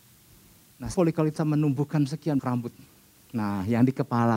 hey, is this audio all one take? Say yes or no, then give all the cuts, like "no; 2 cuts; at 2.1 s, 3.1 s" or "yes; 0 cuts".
no; 3 cuts; at 0.9 s, 1.4 s, 2.4 s